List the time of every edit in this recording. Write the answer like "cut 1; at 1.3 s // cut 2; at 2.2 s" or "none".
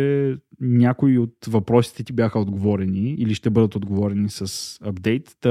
none